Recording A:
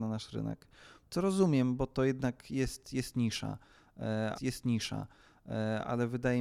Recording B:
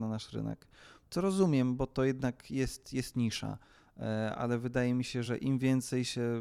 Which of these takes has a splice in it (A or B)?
A